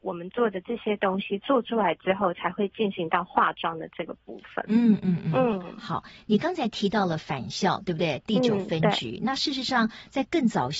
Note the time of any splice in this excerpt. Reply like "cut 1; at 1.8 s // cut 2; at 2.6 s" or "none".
none

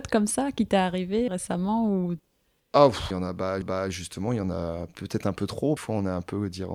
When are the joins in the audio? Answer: cut 1; at 1.3 s // cut 2; at 3.1 s // cut 3; at 3.6 s // cut 4; at 5.8 s

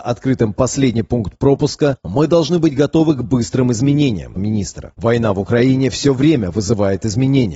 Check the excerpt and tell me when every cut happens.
cut 1; at 4.4 s

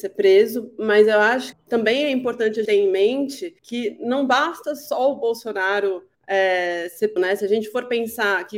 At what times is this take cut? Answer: cut 1; at 1.5 s // cut 2; at 2.7 s // cut 3; at 3.6 s // cut 4; at 6.1 s // cut 5; at 7.2 s

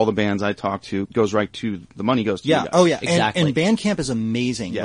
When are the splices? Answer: cut 1; at 1.0 s

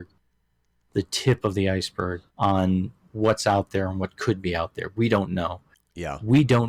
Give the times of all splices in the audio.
cut 1; at 2.3 s

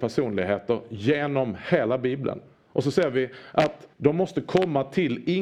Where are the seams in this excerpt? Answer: cut 1; at 2.5 s // cut 2; at 3.9 s

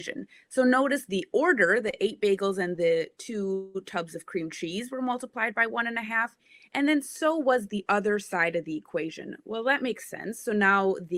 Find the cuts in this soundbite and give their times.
none

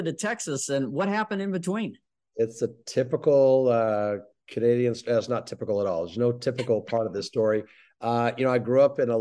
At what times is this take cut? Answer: none

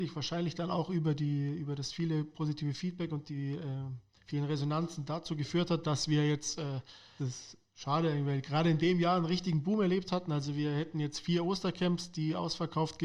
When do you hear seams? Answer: cut 1; at 4.2 s // cut 2; at 7.2 s

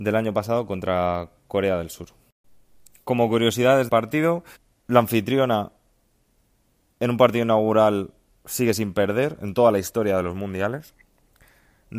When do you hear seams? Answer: cut 1; at 3.9 s // cut 2; at 4.5 s

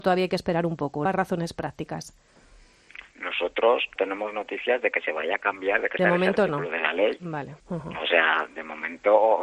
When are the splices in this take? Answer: cut 1; at 1.1 s // cut 2; at 4.0 s // cut 3; at 6.0 s // cut 4; at 7.6 s

